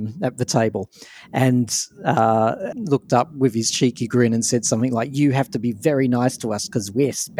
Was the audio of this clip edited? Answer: yes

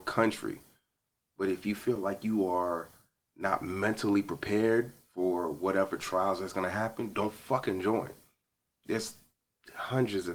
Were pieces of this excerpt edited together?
no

